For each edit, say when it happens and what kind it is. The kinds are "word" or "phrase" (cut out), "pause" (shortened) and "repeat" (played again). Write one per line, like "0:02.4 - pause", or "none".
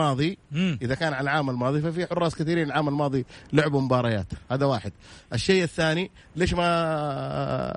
none

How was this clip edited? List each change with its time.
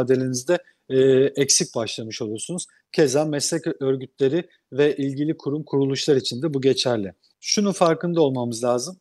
none

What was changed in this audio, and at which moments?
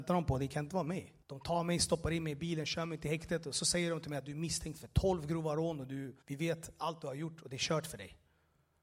0:01.2 - pause
0:06.2 - pause

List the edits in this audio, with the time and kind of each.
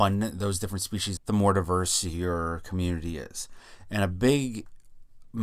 0:01.2 - word

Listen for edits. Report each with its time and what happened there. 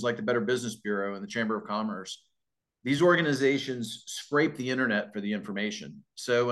none

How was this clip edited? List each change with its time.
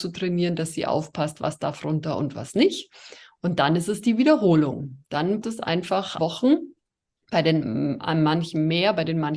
0:05.4 - word
0:06.2 - word

